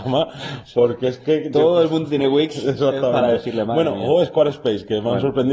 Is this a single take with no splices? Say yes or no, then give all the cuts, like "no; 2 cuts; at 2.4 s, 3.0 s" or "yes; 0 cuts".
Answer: yes; 0 cuts